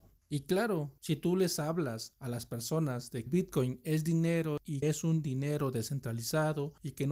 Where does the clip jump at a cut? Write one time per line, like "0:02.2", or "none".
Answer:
0:03.3
0:04.8